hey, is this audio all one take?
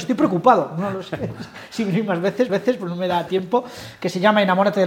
no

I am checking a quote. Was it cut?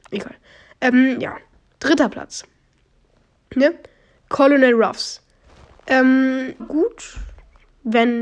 yes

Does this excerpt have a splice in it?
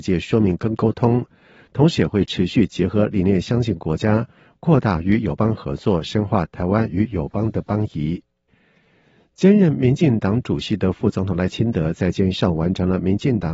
no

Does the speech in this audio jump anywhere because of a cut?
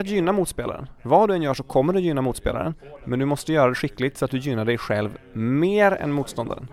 no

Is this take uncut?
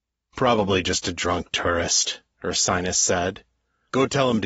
yes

